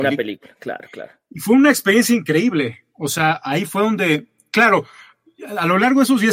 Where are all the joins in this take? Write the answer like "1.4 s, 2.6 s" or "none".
2.9 s